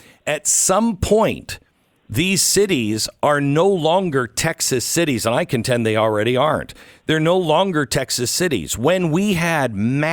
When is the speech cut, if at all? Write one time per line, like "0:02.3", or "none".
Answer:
none